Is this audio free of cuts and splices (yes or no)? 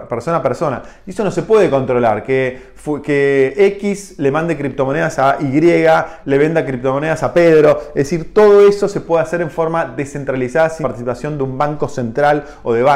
no